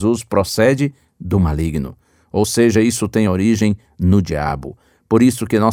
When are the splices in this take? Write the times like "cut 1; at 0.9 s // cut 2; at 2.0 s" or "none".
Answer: none